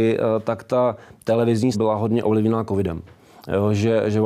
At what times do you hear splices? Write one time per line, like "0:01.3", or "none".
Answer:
0:01.7